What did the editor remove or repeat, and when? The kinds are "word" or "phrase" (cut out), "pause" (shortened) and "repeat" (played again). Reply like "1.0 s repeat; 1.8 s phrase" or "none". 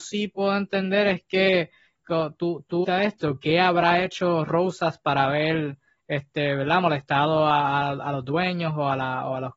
2.8 s word